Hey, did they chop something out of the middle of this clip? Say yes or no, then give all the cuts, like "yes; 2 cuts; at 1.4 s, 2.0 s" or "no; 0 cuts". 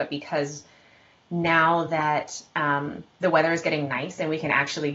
no; 0 cuts